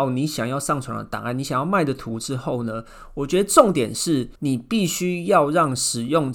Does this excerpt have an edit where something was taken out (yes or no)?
yes